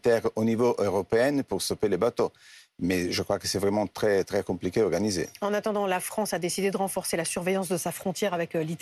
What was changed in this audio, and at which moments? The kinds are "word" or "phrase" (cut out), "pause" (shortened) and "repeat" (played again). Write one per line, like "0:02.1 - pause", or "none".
none